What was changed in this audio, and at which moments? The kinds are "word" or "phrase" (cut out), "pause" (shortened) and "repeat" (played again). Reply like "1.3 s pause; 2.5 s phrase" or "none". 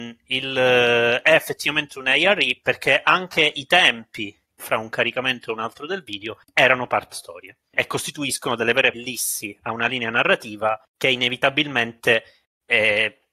4.6 s word; 6.4 s pause; 7.1 s word; 7.7 s word; 8.9 s word; 10.8 s pause